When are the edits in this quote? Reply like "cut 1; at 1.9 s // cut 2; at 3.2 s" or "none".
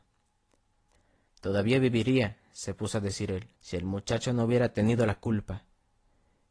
cut 1; at 3.5 s